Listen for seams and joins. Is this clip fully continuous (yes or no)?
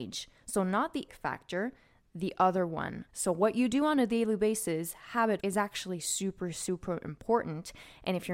no